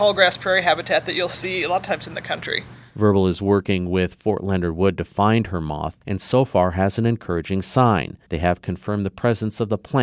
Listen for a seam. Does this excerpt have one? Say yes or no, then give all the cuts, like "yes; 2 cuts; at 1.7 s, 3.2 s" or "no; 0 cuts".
yes; 2 cuts; at 6.0 s, 8.2 s